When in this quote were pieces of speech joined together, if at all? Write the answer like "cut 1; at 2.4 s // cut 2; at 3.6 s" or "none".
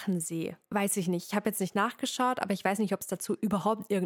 none